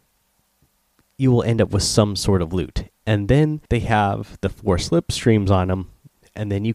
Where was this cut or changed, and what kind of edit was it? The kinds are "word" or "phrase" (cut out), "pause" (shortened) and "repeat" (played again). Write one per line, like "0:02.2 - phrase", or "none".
0:03.7 - pause